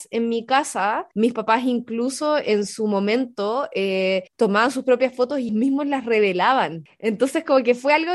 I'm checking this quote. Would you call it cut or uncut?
cut